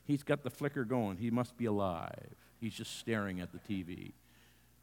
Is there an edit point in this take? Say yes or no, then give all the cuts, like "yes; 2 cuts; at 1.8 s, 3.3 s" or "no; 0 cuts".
no; 0 cuts